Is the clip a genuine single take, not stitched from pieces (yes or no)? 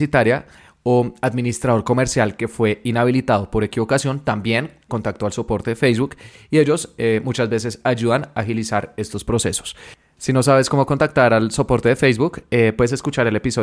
no